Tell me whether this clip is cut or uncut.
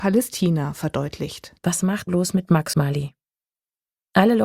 cut